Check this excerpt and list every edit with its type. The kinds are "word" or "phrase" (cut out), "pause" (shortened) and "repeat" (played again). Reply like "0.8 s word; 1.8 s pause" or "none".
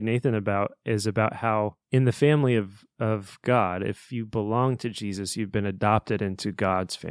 none